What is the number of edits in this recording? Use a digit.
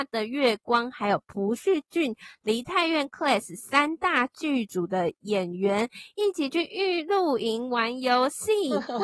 0